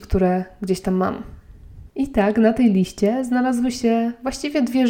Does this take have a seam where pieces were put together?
yes; 1 cut; at 1.9 s

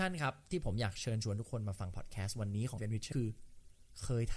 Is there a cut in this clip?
yes; 2 cuts; at 2.8 s, 3.1 s

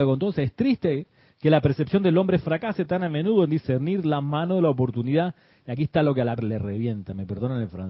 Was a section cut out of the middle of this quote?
yes; 1 cut; at 6.4 s

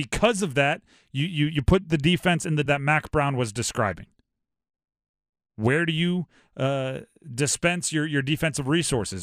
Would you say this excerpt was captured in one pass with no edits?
no; 1 cut; at 2.7 s

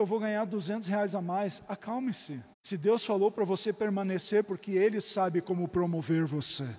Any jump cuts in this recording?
yes; 2 cuts; at 2.5 s, 4.4 s

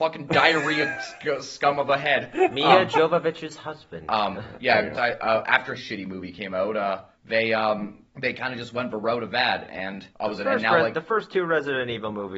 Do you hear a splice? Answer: yes; 5 cuts; at 4.9 s, 5.8 s, 7.1 s, 8.1 s, 10.1 s

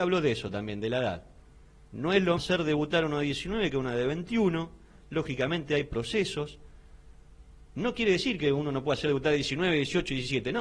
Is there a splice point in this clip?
yes; 1 cut; at 2.4 s

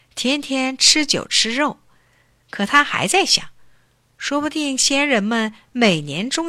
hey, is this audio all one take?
yes; 0 cuts

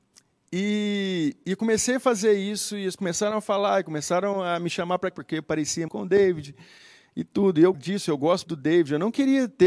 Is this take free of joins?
no; 5 cuts; at 3.0 s, 5.1 s, 5.9 s, 7.7 s, 8.4 s

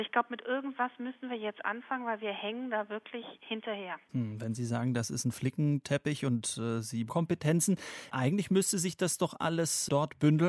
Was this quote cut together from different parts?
yes; 1 cut; at 7.1 s

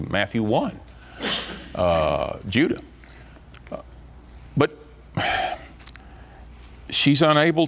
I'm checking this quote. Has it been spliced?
no; 0 cuts

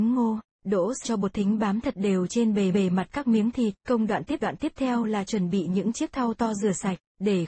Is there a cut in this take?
yes; 4 cuts; at 1.0 s, 2.7 s, 3.8 s, 4.4 s

